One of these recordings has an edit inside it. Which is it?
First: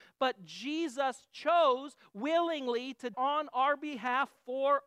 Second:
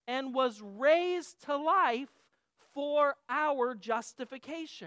first; 1 cut; at 3.1 s

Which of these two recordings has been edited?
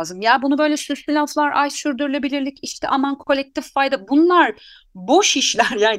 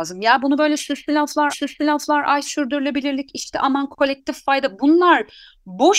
second; 1 cut; at 1.5 s

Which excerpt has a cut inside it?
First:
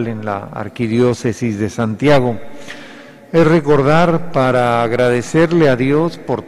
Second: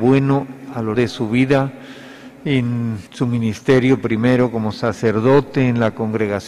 second; 2 cuts; at 0.9 s, 3.1 s

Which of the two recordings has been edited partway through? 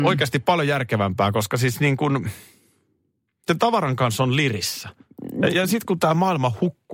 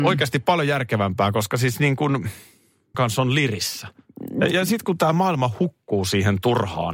second; 1 cut; at 2.9 s

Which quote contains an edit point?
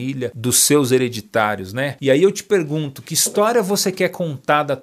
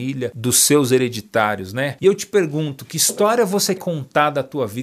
second; 2 cuts; at 2.0 s, 3.8 s

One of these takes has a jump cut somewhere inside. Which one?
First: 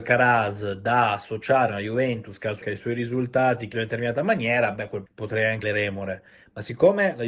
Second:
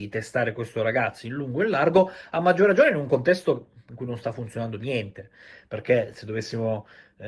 first; 4 cuts; at 2.6 s, 3.7 s, 5.1 s, 5.6 s

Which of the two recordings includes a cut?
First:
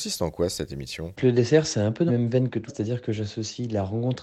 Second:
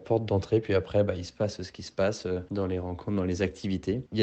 first; 3 cuts; at 1.2 s, 2.1 s, 2.7 s

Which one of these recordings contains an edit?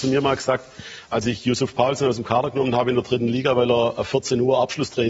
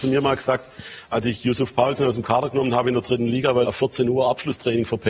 second; 1 cut; at 3.7 s

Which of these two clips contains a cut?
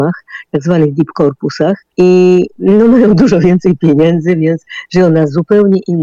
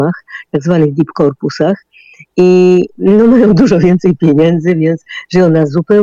first; 1 cut; at 1.9 s

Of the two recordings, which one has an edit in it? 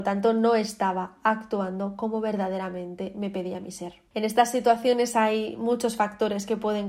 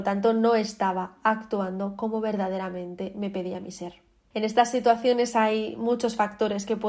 first; 1 cut; at 4.1 s

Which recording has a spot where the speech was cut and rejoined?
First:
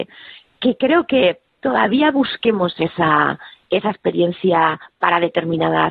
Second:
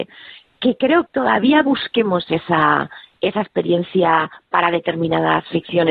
second; 1 cut; at 1.1 s

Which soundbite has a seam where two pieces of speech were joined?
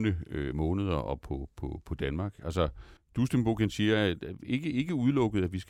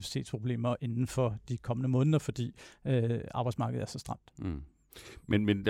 first; 1 cut; at 3.0 s

